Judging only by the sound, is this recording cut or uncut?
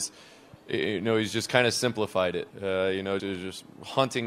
cut